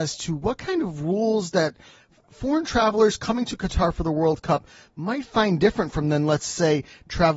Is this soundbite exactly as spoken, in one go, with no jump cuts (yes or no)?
yes